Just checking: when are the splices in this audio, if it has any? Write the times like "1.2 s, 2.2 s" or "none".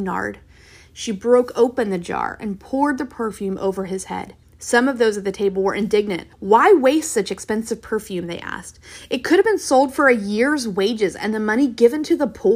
4.4 s, 6.3 s